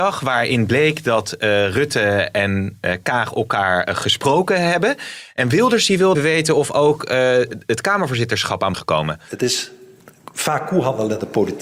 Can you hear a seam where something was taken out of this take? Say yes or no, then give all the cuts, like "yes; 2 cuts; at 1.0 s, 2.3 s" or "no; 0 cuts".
yes; 2 cuts; at 6.1 s, 8.7 s